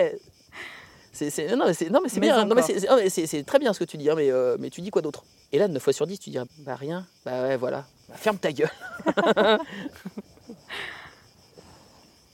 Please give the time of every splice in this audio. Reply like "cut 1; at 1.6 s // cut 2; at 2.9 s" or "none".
cut 1; at 5.4 s // cut 2; at 6.5 s

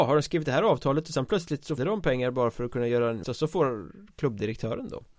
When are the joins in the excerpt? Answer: cut 1; at 1.8 s // cut 2; at 3.2 s

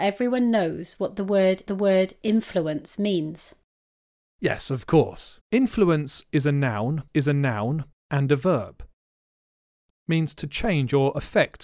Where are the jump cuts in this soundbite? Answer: cut 1; at 1.7 s // cut 2; at 5.4 s // cut 3; at 7.1 s // cut 4; at 9.9 s

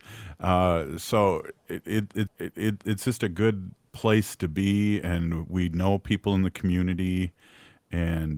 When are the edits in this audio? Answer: cut 1; at 2.3 s

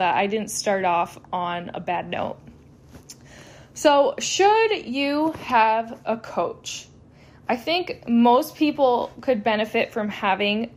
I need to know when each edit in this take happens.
none

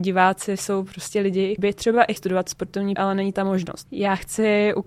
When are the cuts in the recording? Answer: cut 1; at 1.6 s // cut 2; at 2.2 s // cut 3; at 3.0 s // cut 4; at 3.3 s // cut 5; at 3.9 s

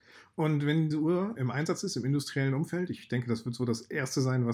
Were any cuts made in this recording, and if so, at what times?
cut 1; at 0.9 s // cut 2; at 1.4 s

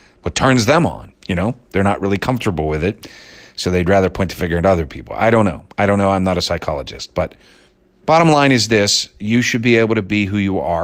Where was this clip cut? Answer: cut 1; at 1.2 s // cut 2; at 7.7 s

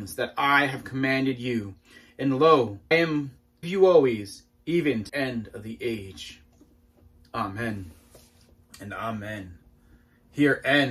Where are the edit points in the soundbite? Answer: cut 1; at 2.9 s // cut 2; at 3.6 s // cut 3; at 5.1 s

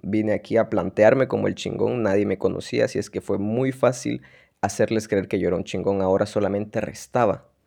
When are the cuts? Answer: none

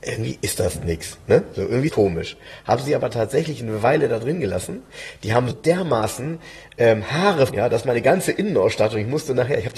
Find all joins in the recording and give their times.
cut 1; at 1.9 s // cut 2; at 5.5 s // cut 3; at 7.5 s

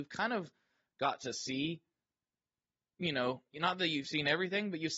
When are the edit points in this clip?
none

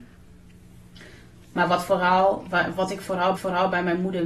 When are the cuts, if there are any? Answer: cut 1; at 3.4 s

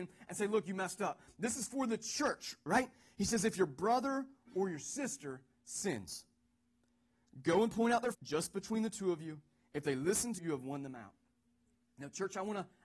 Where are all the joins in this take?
cut 1; at 8.1 s // cut 2; at 10.4 s

